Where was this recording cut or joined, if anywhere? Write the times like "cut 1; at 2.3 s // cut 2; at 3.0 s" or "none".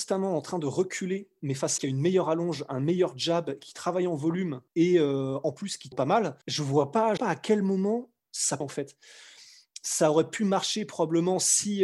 cut 1; at 1.8 s // cut 2; at 4.7 s // cut 3; at 5.9 s // cut 4; at 6.4 s // cut 5; at 7.2 s // cut 6; at 8.6 s